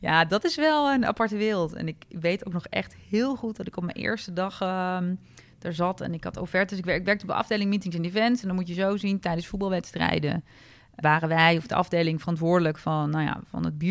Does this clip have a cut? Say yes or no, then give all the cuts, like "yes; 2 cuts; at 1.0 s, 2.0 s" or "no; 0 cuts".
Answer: yes; 1 cut; at 11.0 s